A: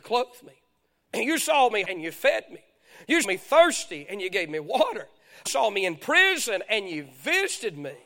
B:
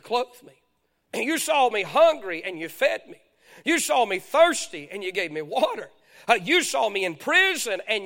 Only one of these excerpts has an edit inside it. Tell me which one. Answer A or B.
A